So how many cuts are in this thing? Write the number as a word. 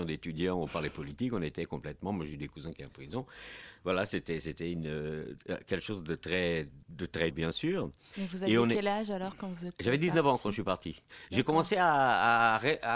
two